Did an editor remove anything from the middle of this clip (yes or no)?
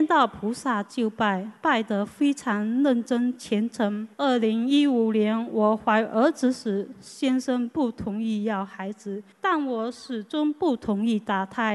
yes